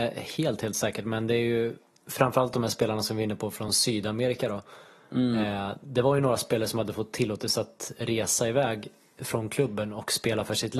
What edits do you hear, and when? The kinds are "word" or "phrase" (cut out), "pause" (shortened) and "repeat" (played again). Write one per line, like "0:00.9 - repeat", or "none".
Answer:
none